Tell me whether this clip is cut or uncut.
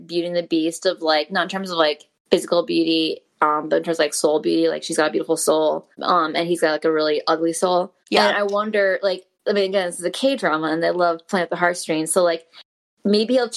cut